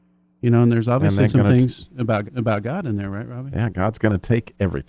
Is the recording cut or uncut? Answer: cut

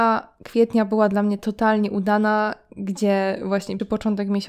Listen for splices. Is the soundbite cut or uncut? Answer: uncut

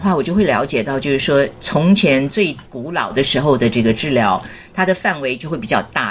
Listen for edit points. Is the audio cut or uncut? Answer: cut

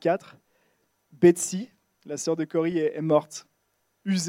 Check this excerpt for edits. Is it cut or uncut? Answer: uncut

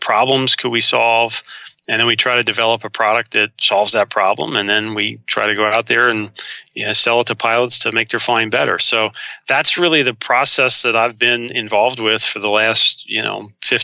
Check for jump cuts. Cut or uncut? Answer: uncut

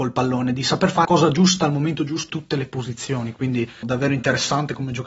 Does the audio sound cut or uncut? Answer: cut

